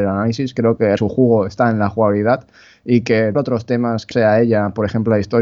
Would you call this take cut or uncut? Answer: cut